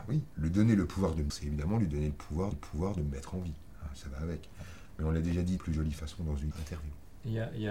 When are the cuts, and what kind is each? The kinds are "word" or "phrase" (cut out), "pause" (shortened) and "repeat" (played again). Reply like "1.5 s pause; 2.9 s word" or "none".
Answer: 1.3 s word; 2.5 s repeat; 4.0 s word; 5.6 s word; 6.5 s word